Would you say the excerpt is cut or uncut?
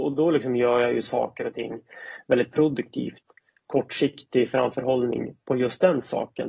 uncut